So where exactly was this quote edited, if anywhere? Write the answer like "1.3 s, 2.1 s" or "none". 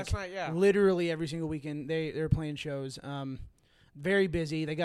none